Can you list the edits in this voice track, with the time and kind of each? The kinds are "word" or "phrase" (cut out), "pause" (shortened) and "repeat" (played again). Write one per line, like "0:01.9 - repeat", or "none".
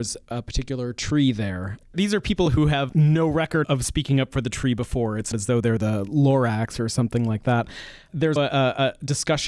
0:02.9 - word
0:03.6 - word
0:05.3 - word
0:08.4 - word